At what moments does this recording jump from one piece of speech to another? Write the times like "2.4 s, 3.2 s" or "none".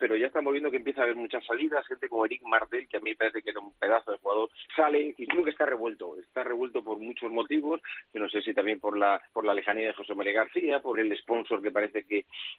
4.7 s, 5.3 s, 9.3 s, 10.9 s